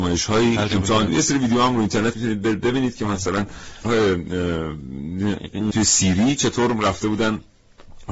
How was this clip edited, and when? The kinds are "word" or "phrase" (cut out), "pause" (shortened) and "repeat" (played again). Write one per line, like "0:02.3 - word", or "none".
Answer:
0:01.1 - word
0:02.1 - word
0:03.8 - word
0:05.7 - word